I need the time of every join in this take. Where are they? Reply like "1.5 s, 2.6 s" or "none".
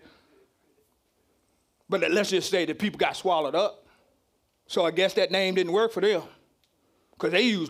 4.4 s

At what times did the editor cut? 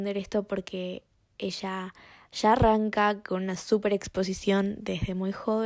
none

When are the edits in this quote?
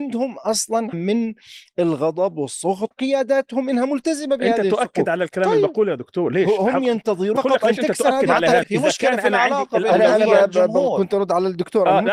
0.9 s, 2.9 s, 7.4 s, 8.6 s

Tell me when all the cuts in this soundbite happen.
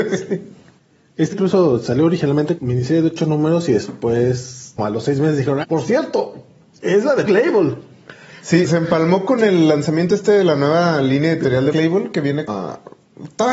1.3 s, 2.6 s, 4.8 s, 5.6 s, 7.2 s, 8.6 s, 11.7 s, 12.5 s

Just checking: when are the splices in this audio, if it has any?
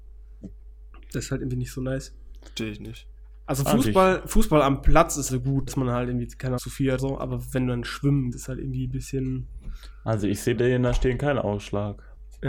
5.3 s, 5.7 s, 6.6 s, 7.0 s, 8.3 s, 10.6 s

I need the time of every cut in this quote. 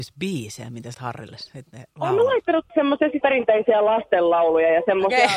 0.9 s, 2.7 s, 3.2 s

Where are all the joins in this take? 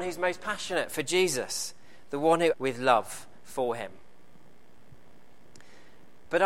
2.5 s

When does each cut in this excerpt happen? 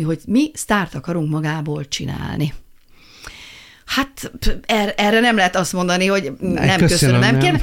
none

